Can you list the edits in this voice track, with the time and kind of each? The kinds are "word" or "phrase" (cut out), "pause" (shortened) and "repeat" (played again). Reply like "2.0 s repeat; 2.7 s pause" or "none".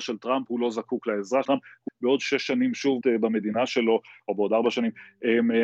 1.4 s word; 1.9 s word; 3.0 s word